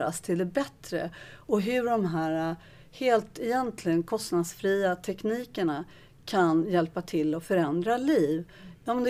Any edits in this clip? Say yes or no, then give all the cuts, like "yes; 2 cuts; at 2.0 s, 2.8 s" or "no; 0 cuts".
no; 0 cuts